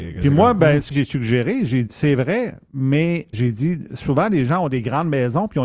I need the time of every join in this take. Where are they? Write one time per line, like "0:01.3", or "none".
0:00.9
0:01.9
0:03.3